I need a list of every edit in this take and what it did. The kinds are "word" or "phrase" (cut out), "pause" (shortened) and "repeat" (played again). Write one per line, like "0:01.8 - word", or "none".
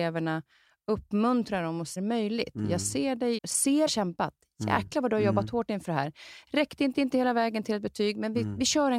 0:02.0 - phrase
0:03.4 - word
0:03.9 - phrase
0:06.9 - repeat